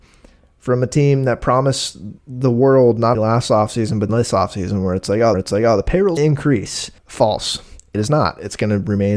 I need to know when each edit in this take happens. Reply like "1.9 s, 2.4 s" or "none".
2.2 s, 3.1 s, 4.1 s, 5.3 s, 6.2 s, 7.0 s